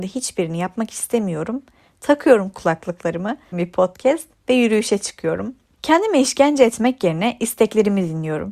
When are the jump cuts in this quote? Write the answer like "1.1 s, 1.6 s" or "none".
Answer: 3.5 s